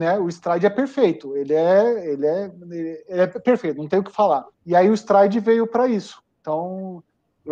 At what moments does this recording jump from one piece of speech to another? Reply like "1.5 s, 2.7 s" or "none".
4.5 s